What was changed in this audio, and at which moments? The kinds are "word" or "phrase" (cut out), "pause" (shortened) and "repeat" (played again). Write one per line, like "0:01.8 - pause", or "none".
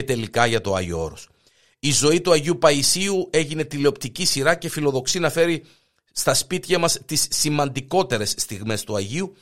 none